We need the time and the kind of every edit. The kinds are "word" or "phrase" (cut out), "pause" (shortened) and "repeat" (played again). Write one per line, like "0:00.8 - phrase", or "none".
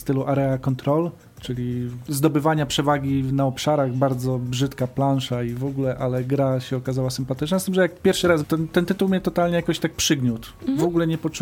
0:08.4 - word